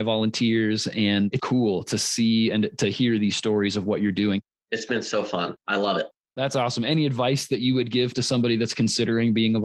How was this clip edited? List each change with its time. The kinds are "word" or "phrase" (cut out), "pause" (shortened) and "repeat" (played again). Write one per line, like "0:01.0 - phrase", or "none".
0:01.4 - word